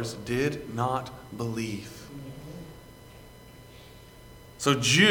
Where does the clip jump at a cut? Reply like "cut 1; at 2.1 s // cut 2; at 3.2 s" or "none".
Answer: none